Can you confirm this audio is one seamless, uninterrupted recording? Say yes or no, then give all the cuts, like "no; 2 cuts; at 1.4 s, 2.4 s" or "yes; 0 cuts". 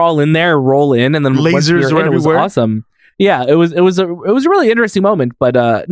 yes; 0 cuts